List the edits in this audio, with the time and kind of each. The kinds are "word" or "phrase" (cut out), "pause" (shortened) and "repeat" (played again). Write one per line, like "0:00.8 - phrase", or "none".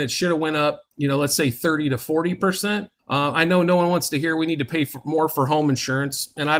0:00.9 - pause
0:03.0 - pause